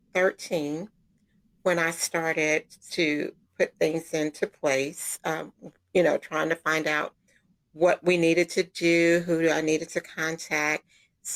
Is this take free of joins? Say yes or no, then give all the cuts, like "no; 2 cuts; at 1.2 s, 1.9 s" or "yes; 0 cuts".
yes; 0 cuts